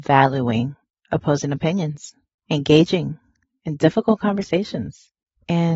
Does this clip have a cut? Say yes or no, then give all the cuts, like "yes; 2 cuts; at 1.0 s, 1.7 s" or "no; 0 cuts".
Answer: no; 0 cuts